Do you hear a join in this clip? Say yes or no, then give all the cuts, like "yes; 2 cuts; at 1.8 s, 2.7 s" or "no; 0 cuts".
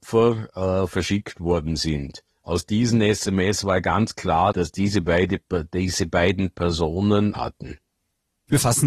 yes; 3 cuts; at 2.3 s, 4.5 s, 7.3 s